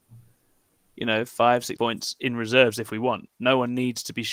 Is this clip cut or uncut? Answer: cut